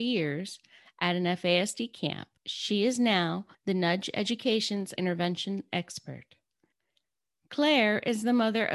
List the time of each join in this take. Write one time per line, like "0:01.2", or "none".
0:02.4
0:03.5
0:05.0